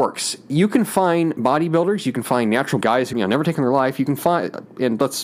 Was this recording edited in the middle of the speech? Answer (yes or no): yes